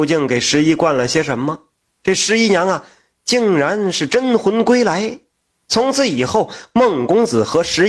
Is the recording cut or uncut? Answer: uncut